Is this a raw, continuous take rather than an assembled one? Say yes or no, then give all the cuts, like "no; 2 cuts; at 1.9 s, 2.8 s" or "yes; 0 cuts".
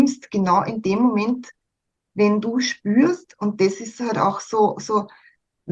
yes; 0 cuts